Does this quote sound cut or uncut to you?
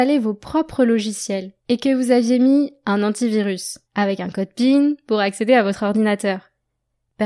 cut